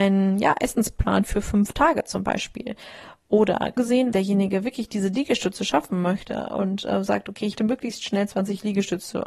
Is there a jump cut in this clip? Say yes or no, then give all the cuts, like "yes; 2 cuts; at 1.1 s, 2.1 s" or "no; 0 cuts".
yes; 3 cuts; at 3.8 s, 4.1 s, 7.6 s